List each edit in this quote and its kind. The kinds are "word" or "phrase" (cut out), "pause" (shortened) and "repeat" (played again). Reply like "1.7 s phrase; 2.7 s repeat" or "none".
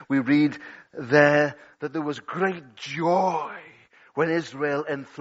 none